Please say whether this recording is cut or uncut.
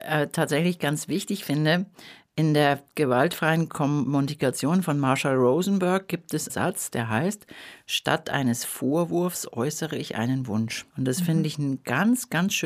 cut